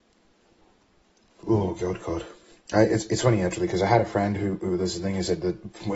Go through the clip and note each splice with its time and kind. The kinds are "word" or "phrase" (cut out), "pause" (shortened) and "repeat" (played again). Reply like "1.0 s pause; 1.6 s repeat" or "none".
none